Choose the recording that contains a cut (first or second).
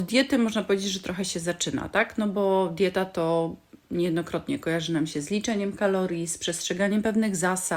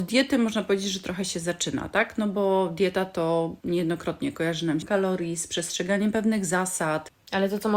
second